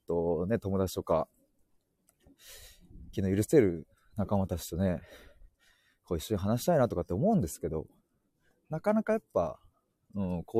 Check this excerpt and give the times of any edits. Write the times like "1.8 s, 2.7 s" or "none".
none